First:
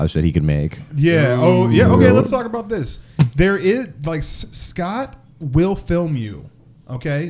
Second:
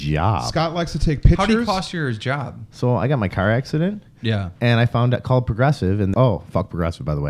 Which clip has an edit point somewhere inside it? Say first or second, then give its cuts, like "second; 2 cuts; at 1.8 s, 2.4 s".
second; 1 cut; at 6.1 s